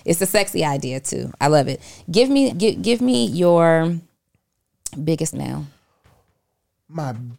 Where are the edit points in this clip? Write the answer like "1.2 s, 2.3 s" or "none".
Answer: 2.5 s, 5.3 s